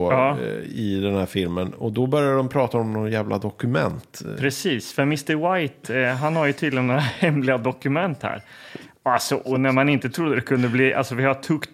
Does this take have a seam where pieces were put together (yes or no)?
no